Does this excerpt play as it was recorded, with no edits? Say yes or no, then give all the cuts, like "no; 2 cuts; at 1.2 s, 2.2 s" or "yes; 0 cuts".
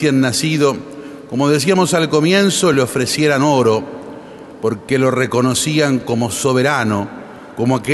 yes; 0 cuts